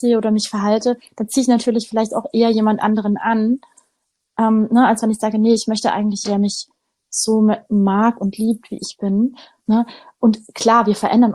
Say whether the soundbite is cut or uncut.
cut